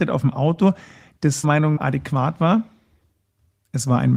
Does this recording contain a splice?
yes; 2 cuts; at 1.4 s, 1.8 s

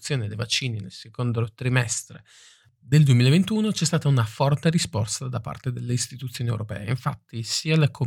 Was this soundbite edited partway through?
no; 0 cuts

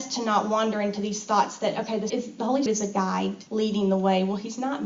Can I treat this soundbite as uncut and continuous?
no; 3 cuts; at 2.1 s, 2.7 s, 3.5 s

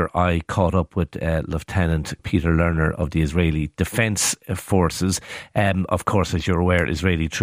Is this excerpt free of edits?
no; 1 cut; at 2.2 s

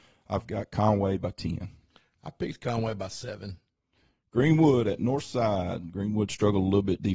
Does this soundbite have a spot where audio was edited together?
no; 0 cuts

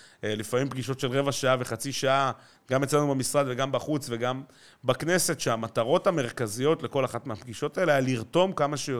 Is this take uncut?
yes; 0 cuts

